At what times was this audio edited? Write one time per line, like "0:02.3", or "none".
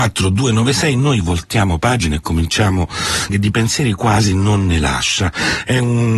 0:03.3

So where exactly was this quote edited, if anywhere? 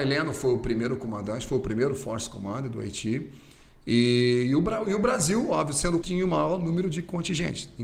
0:06.0

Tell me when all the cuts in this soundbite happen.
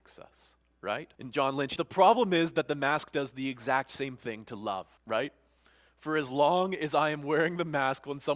0:01.1
0:01.8
0:05.0

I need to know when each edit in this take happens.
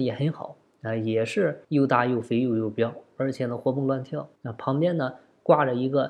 0:01.6
0:04.4

